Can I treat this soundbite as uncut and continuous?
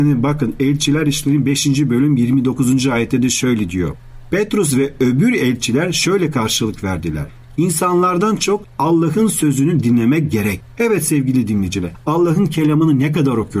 yes; 0 cuts

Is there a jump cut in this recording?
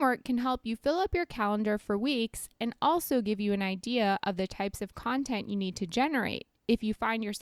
no; 0 cuts

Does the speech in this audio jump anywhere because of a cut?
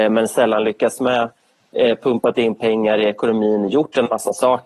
no; 0 cuts

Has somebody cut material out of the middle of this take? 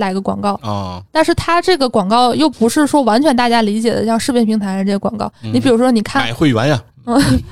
yes; 1 cut; at 1.1 s

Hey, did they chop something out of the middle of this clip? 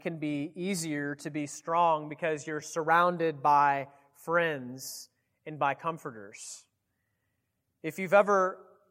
no; 0 cuts

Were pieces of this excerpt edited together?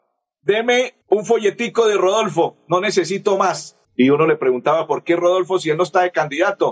yes; 2 cuts; at 1.0 s, 3.8 s

